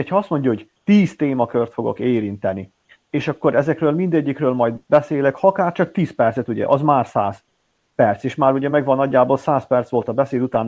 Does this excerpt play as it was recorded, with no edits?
yes; 0 cuts

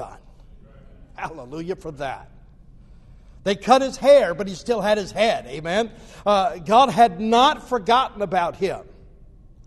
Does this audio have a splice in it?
no; 0 cuts

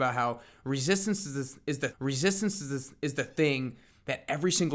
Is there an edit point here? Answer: yes; 1 cut; at 1.9 s

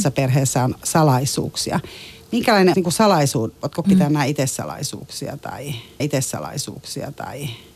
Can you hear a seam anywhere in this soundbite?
yes; 3 cuts; at 2.7 s, 3.8 s, 6.0 s

